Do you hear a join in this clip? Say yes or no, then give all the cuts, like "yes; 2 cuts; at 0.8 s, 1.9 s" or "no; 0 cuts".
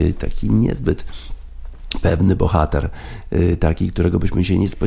no; 0 cuts